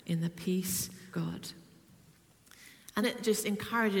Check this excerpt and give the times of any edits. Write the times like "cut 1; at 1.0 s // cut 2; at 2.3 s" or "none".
cut 1; at 1.1 s // cut 2; at 3.0 s